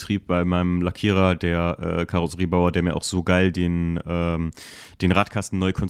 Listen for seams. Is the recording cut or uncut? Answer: uncut